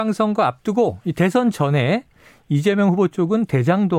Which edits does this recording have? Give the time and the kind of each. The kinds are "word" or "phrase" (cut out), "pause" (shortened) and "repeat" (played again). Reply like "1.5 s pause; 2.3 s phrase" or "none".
none